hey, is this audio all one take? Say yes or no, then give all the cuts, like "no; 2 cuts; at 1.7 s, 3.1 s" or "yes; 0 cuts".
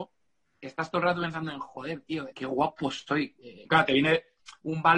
no; 2 cuts; at 2.3 s, 3.6 s